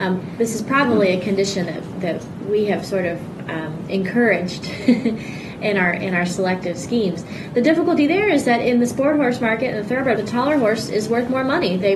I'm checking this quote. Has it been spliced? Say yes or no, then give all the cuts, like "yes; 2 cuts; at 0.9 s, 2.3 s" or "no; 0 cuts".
yes; 1 cut; at 10.2 s